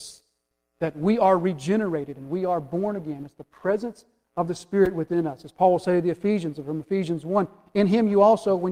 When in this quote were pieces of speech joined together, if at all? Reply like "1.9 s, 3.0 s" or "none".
none